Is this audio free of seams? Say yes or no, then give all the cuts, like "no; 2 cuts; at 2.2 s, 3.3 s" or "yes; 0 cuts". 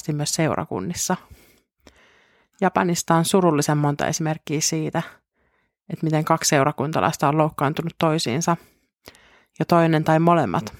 yes; 0 cuts